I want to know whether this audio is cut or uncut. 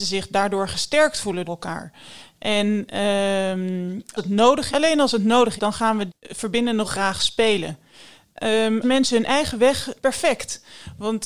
cut